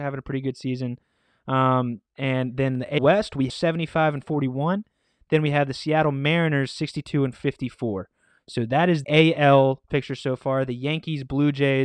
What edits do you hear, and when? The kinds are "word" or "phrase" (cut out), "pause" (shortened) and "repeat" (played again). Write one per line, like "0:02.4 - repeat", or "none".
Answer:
0:02.1 - pause
0:03.0 - word
0:03.5 - phrase
0:09.0 - word
0:09.9 - word